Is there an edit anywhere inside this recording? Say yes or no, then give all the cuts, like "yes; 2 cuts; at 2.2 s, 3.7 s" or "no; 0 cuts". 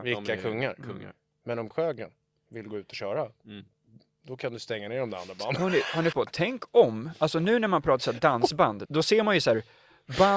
yes; 3 cuts; at 1.7 s, 6.1 s, 8.9 s